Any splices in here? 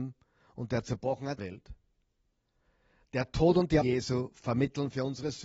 yes; 2 cuts; at 1.4 s, 3.8 s

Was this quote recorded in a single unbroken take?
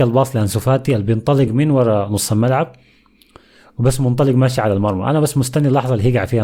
yes; 0 cuts

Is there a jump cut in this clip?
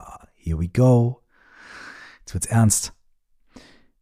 no; 0 cuts

